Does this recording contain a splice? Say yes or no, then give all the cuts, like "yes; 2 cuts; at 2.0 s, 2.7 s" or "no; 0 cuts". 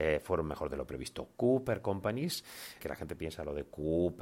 yes; 1 cut; at 2.8 s